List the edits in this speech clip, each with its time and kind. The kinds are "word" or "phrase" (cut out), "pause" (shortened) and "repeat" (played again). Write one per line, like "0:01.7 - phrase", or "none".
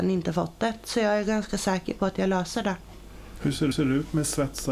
0:03.7 - repeat